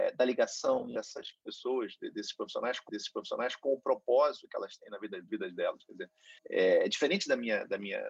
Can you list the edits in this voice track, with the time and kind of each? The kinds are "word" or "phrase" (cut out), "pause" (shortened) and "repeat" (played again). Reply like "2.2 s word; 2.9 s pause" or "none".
2.9 s repeat; 5.3 s word; 6.4 s pause

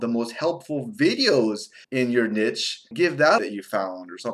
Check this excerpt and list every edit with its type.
1.8 s pause; 2.9 s word; 3.4 s word

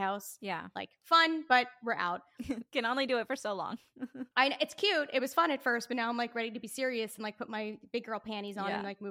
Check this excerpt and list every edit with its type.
none

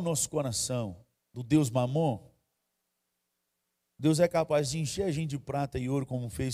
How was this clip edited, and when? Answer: none

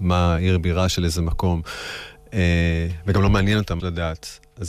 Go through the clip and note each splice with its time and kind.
3.8 s word

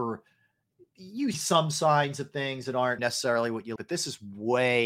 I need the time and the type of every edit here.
1.3 s word; 3.0 s word; 3.8 s word

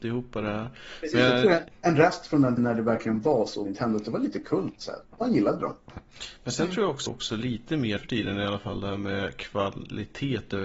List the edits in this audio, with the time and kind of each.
1.7 s pause; 2.6 s word; 3.6 s word; 7.1 s phrase; 8.0 s word

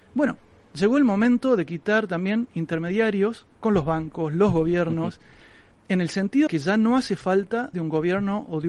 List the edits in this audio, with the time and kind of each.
3.5 s pause; 6.5 s word; 7.7 s word

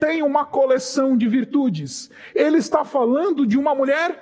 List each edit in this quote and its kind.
none

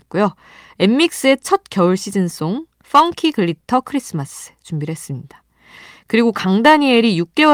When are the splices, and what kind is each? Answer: none

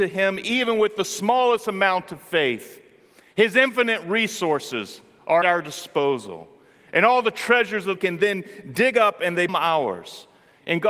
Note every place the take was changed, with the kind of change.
5.4 s word; 8.0 s phrase; 9.5 s word

